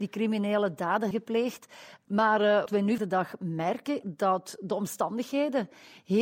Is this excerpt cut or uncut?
cut